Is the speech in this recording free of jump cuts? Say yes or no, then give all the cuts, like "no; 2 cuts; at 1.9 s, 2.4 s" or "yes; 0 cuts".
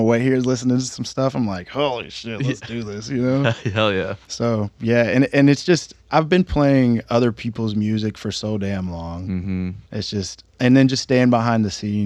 no; 4 cuts; at 4.2 s, 6.0 s, 9.8 s, 10.5 s